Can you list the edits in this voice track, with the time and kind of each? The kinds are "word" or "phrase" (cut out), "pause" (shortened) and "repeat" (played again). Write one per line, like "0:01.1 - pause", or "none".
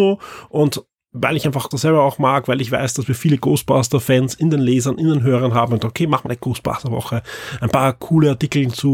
0:01.7 - word
0:06.3 - word